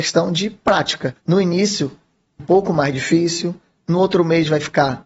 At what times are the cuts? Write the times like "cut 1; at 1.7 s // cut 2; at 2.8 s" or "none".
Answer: cut 1; at 1.2 s // cut 2; at 2.4 s